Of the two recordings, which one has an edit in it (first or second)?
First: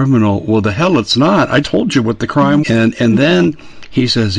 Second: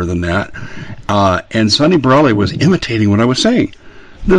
first